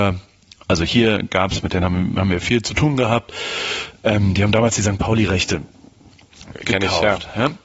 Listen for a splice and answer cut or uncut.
uncut